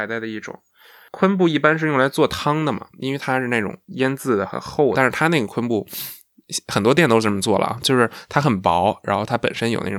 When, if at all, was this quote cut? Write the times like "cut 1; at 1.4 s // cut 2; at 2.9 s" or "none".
cut 1; at 4.9 s